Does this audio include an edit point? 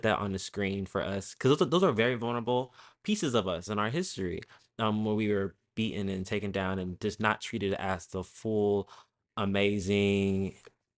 no; 0 cuts

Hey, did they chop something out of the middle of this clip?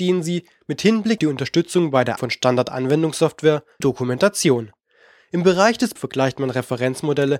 yes; 4 cuts; at 1.2 s, 2.2 s, 3.8 s, 6.0 s

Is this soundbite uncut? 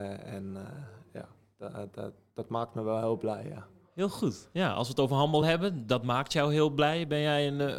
yes; 0 cuts

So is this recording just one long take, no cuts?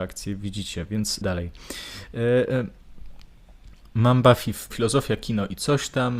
no; 2 cuts; at 1.2 s, 4.7 s

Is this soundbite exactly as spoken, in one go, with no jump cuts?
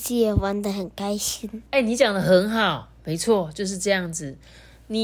no; 1 cut; at 1.7 s

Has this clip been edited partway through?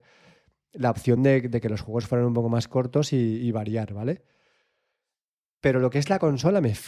no; 0 cuts

